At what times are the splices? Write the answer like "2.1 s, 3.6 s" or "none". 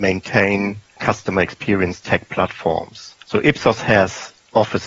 3.2 s